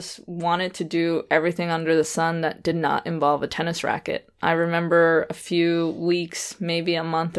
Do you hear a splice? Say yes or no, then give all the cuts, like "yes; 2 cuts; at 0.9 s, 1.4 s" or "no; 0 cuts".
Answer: no; 0 cuts